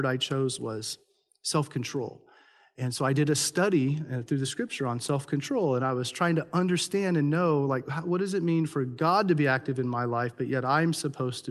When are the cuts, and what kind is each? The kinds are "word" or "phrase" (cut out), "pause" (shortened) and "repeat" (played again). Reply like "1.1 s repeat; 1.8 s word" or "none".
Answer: none